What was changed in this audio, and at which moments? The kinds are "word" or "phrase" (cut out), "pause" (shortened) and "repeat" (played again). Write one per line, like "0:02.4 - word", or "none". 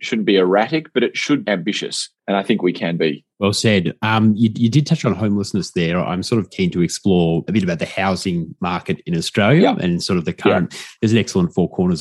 0:01.4 - word
0:02.2 - pause
0:03.3 - pause
0:07.5 - word